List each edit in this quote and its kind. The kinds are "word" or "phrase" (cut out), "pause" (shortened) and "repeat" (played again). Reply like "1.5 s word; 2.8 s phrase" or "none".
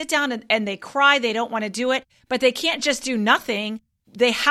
none